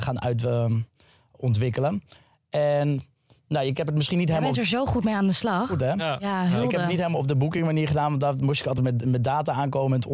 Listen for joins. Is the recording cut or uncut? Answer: uncut